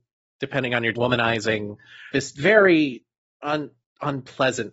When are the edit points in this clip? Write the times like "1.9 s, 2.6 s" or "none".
0.9 s, 2.1 s